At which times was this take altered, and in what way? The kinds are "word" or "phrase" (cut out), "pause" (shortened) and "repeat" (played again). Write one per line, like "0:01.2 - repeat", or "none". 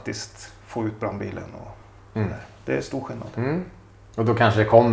none